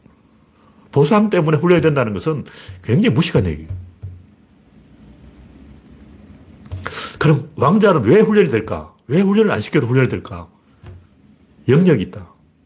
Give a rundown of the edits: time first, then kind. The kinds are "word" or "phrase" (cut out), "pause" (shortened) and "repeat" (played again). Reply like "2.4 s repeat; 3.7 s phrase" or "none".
none